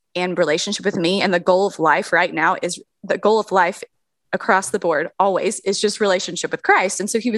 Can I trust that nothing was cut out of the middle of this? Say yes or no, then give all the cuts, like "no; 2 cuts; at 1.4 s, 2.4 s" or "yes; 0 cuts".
yes; 0 cuts